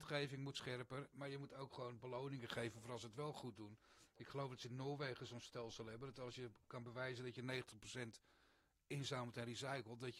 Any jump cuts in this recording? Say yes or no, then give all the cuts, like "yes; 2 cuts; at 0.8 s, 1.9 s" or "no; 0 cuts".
no; 0 cuts